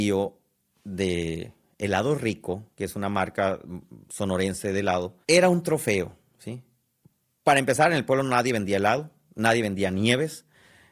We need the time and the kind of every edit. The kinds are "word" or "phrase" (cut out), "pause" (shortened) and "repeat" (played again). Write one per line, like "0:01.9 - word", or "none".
0:05.2 - pause